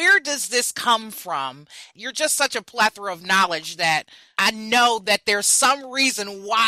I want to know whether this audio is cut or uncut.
uncut